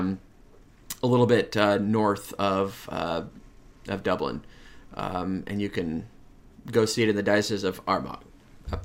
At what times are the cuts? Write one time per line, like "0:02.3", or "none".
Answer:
none